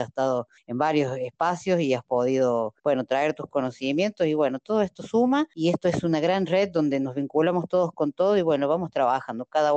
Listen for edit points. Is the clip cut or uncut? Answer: cut